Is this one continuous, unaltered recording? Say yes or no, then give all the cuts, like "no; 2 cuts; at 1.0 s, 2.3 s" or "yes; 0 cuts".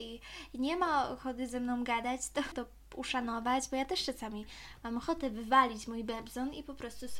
no; 1 cut; at 2.5 s